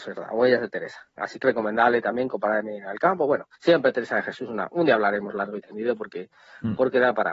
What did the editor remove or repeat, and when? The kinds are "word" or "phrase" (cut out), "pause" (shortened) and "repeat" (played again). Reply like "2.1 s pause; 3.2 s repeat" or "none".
1.4 s word; 3.5 s pause